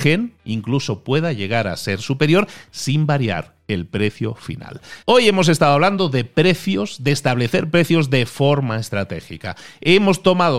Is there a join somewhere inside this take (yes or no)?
yes